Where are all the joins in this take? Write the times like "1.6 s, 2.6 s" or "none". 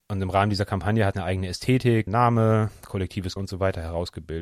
1.1 s, 2.1 s, 3.4 s